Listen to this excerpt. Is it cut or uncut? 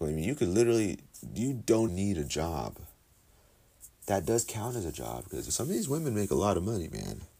cut